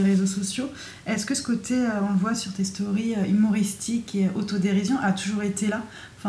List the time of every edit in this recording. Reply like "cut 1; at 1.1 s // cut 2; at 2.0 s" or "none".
none